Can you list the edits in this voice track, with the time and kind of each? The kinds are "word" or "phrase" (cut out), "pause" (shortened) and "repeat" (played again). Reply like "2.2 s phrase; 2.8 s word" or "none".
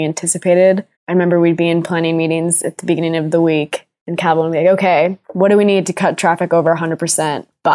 0.9 s pause; 5.2 s pause